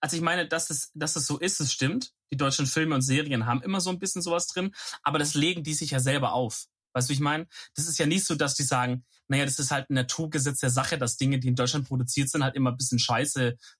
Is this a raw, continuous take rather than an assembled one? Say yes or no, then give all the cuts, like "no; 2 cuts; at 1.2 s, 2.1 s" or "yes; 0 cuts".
yes; 0 cuts